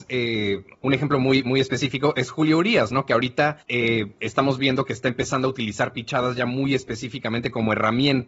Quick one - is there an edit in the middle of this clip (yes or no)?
yes